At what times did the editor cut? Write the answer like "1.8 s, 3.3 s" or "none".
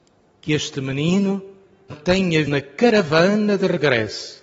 1.9 s, 2.5 s